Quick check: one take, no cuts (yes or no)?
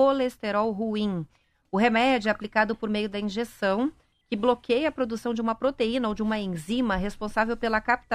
yes